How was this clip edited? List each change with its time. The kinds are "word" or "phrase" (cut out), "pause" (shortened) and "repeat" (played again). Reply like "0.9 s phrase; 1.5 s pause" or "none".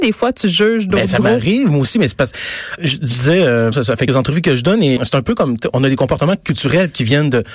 2.8 s word; 3.7 s word; 4.1 s word; 5.0 s word; 5.7 s word